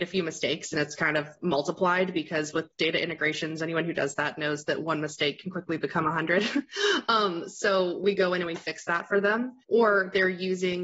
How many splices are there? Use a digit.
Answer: 1